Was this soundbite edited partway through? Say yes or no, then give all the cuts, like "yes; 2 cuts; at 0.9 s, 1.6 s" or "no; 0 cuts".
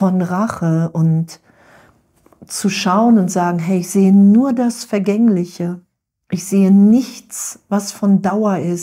no; 0 cuts